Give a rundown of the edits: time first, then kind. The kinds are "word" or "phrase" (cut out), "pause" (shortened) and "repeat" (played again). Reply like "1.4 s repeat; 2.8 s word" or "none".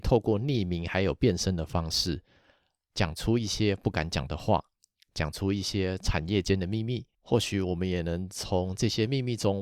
none